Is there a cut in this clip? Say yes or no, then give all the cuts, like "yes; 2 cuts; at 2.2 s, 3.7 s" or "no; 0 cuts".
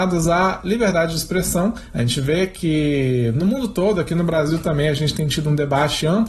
no; 0 cuts